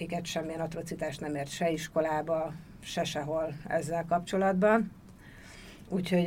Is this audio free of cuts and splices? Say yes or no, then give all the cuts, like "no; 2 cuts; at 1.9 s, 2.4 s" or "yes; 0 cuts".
yes; 0 cuts